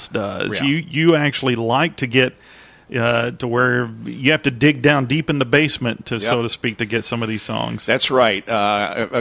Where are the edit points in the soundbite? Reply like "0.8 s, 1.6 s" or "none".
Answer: none